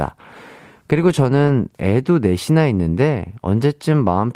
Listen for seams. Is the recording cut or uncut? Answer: uncut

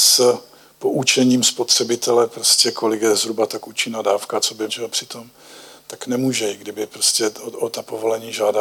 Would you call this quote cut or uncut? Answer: cut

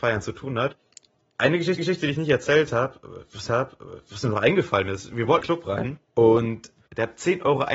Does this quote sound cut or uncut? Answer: cut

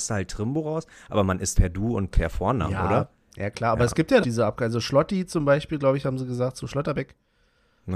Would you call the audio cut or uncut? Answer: cut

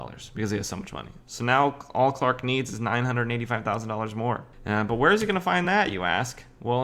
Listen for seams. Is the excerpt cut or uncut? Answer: uncut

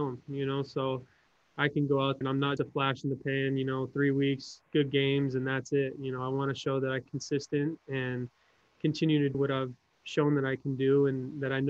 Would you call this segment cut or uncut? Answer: cut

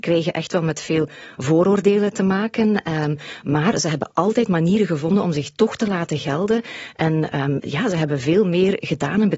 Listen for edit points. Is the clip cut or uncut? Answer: uncut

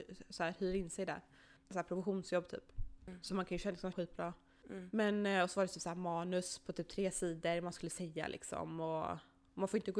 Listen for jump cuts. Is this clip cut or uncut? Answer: cut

